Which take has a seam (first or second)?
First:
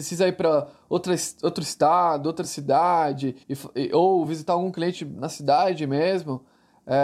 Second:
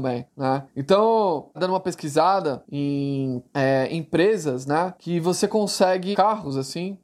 second